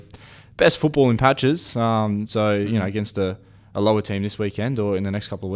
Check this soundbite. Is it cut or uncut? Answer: uncut